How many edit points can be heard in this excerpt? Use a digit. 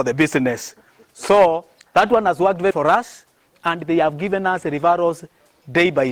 1